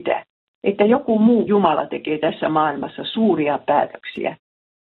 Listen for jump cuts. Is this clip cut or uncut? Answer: cut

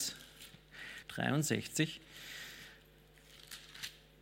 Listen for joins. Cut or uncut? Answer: cut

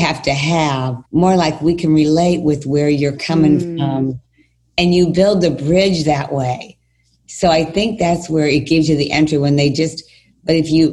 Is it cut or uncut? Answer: cut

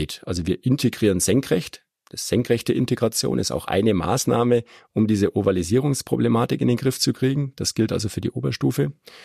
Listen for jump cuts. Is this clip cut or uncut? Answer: uncut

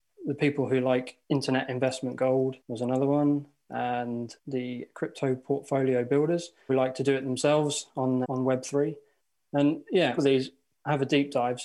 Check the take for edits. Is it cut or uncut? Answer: cut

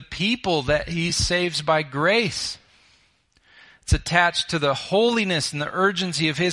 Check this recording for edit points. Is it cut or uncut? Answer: uncut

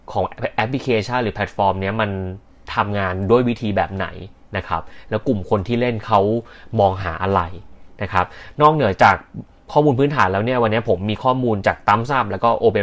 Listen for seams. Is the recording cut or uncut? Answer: uncut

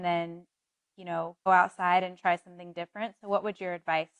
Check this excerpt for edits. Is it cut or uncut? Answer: cut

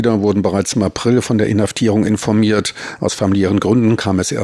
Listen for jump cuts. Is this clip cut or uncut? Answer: uncut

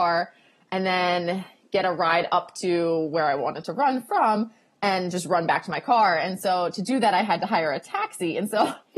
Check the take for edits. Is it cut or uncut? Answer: uncut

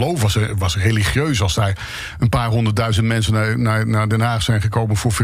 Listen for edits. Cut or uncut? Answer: uncut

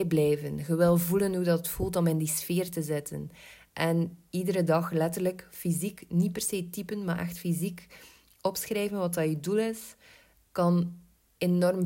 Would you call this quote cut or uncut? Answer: uncut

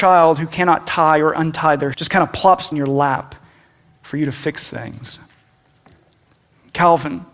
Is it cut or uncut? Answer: cut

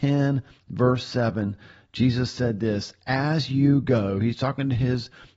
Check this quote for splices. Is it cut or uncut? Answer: uncut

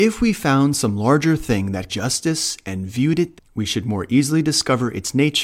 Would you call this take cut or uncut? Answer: cut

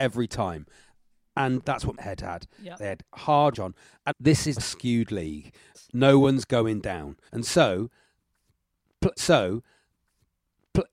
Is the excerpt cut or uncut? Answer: cut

